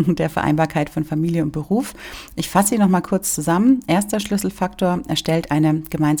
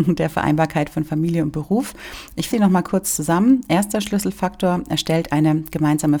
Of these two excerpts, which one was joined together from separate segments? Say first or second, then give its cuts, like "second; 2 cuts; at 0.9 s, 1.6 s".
second; 1 cut; at 2.5 s